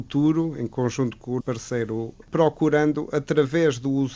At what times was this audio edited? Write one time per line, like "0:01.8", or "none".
0:01.4
0:02.2